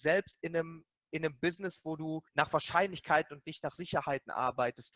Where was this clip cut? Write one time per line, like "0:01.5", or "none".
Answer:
0:02.3